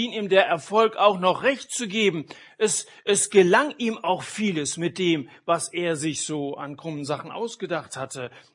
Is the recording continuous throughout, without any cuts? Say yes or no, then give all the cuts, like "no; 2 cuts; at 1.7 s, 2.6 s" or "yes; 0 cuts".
yes; 0 cuts